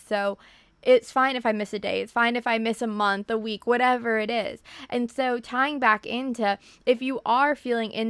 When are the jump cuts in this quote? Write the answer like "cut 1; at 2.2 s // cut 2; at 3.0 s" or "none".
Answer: none

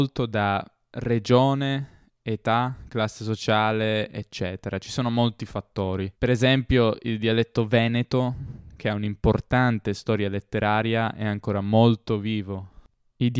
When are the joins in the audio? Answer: cut 1; at 6.1 s

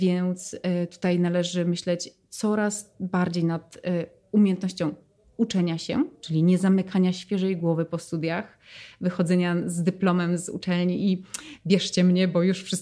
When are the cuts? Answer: none

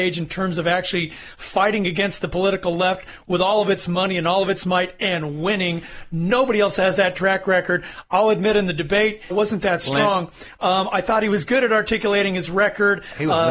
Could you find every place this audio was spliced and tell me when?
cut 1; at 9.3 s

